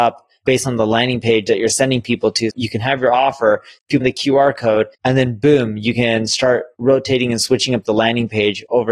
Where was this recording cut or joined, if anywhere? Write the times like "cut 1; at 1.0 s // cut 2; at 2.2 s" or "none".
cut 1; at 2.5 s // cut 2; at 4.0 s // cut 3; at 4.9 s